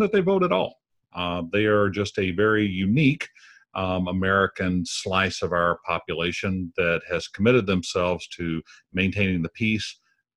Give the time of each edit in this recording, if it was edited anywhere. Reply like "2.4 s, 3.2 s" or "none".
none